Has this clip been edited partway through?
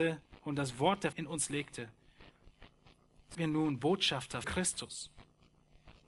yes; 3 cuts; at 1.1 s, 3.3 s, 4.4 s

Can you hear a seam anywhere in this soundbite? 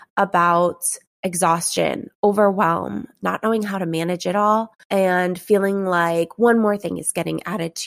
yes; 1 cut; at 4.8 s

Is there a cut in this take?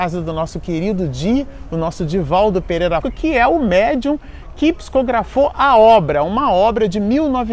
yes; 1 cut; at 3.0 s

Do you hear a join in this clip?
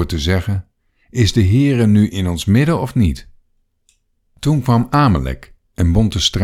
no; 0 cuts

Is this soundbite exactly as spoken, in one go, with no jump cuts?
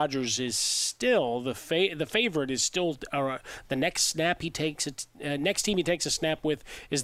yes; 0 cuts

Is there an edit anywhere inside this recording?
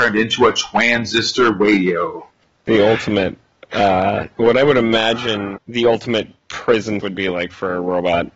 yes; 2 cuts; at 5.6 s, 7.0 s

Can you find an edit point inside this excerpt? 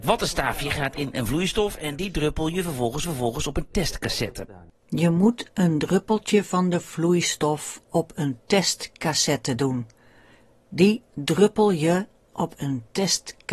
yes; 1 cut; at 3.0 s

